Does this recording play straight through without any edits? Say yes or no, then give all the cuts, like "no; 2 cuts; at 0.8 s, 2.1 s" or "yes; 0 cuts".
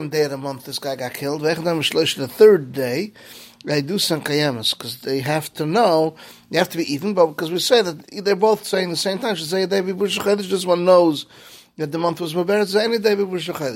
yes; 0 cuts